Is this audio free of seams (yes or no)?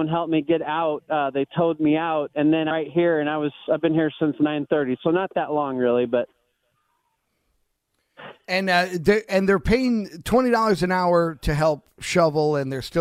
no